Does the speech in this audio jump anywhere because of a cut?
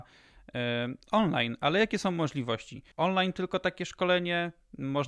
yes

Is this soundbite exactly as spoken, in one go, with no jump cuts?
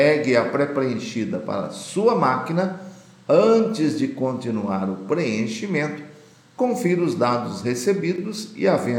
yes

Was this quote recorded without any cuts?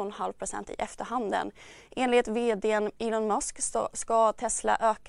yes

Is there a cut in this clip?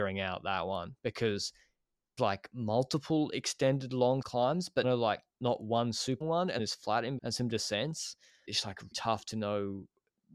yes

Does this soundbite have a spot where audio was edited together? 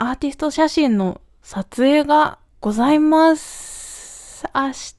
yes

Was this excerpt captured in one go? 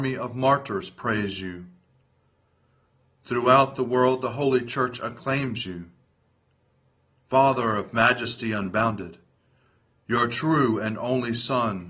yes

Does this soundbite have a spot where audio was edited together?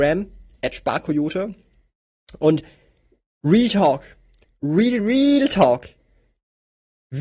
yes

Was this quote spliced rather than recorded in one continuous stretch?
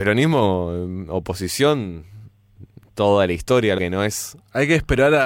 yes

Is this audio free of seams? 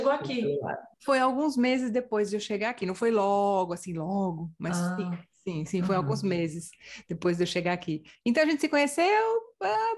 no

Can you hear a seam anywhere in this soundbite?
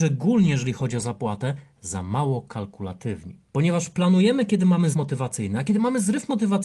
yes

